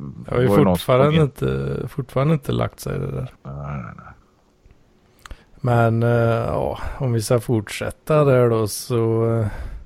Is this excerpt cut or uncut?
cut